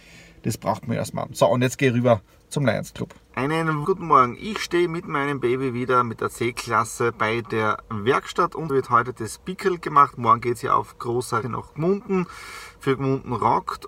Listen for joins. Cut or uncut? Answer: cut